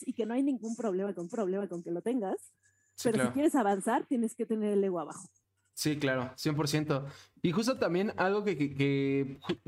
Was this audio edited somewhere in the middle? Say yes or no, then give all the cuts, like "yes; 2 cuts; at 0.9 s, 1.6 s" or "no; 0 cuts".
yes; 1 cut; at 1.3 s